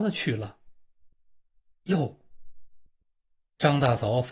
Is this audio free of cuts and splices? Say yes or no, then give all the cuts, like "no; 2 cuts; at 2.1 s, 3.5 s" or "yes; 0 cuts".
yes; 0 cuts